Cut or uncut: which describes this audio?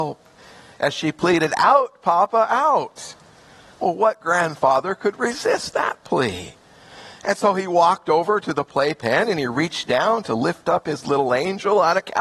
uncut